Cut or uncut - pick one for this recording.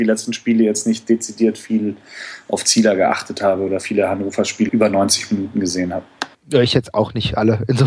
cut